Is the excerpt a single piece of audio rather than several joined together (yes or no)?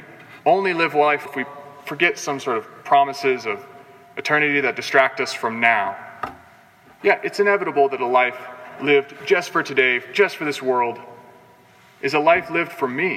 no